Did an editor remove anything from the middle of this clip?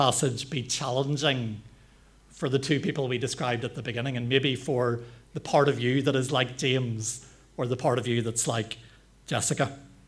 no; 0 cuts

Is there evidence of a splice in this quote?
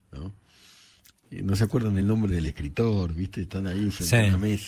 no; 0 cuts

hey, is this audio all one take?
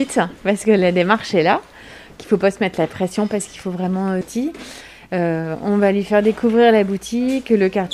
no; 1 cut; at 4.2 s

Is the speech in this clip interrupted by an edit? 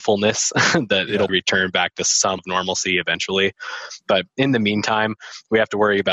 yes; 2 cuts; at 1.3 s, 2.4 s

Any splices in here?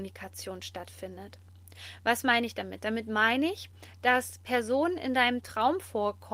no; 0 cuts

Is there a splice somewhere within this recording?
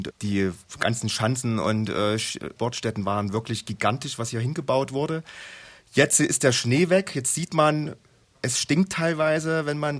no; 0 cuts

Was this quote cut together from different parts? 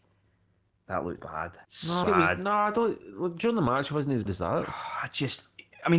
yes; 4 cuts; at 1.2 s, 1.6 s, 2.0 s, 4.3 s

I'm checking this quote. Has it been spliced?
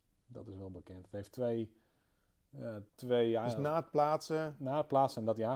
yes; 1 cut; at 2.9 s

